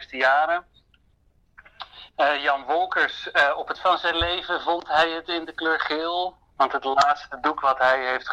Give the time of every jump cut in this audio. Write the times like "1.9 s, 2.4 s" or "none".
3.7 s

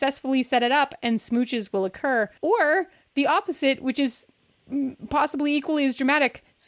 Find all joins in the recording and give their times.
2.4 s

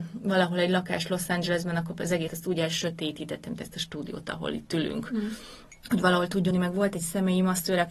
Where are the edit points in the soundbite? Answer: 2.3 s, 5.8 s, 6.5 s

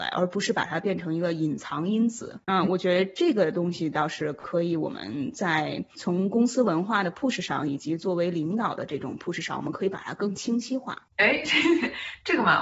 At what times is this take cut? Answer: 2.4 s, 11.1 s

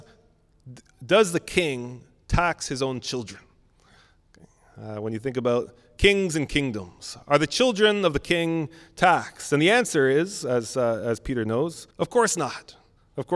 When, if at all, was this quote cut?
11.9 s

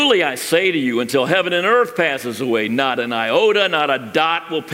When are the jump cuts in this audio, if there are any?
none

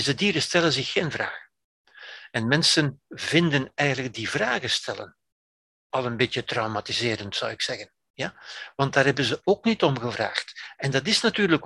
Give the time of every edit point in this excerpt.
3.1 s

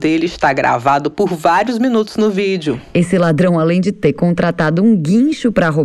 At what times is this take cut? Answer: none

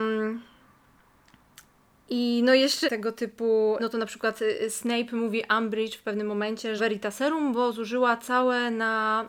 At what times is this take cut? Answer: 2.8 s, 3.8 s, 6.8 s

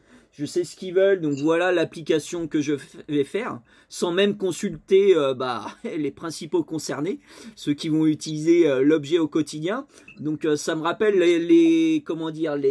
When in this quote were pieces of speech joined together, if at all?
none

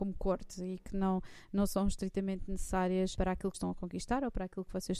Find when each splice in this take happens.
3.2 s, 3.5 s

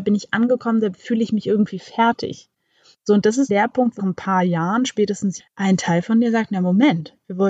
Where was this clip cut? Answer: 3.5 s, 4.0 s, 5.4 s

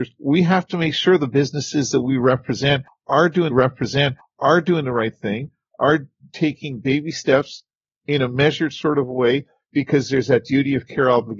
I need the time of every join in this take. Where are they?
3.5 s

